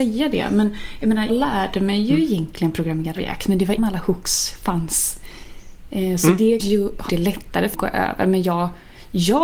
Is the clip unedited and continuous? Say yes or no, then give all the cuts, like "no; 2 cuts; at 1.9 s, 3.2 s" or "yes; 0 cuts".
no; 6 cuts; at 1.3 s, 3.2 s, 3.8 s, 6.6 s, 7.1 s, 7.7 s